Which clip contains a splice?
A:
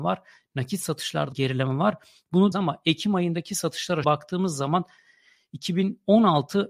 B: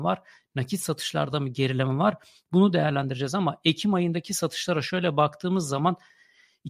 A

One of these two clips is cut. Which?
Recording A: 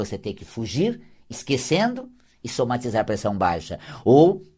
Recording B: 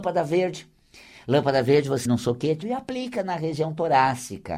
B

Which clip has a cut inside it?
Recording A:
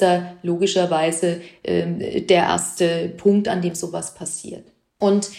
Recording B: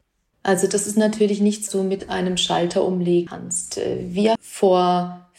B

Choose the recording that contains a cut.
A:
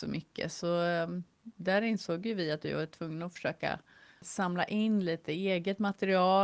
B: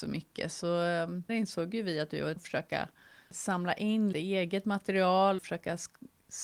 B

